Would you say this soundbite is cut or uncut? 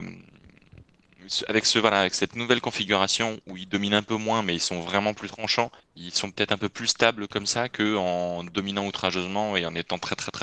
cut